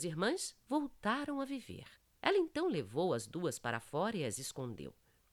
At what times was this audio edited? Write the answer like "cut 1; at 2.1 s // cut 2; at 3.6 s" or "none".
cut 1; at 2.0 s